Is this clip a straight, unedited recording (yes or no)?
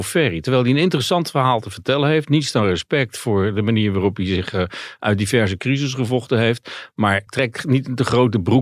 no